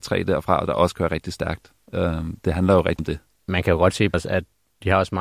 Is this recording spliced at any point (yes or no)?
yes